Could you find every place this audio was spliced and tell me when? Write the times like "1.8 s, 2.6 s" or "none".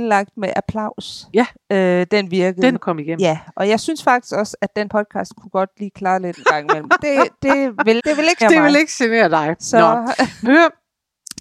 2.8 s, 4.9 s, 6.3 s, 8.0 s, 8.4 s, 10.4 s